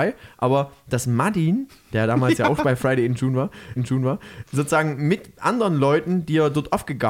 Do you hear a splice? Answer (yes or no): yes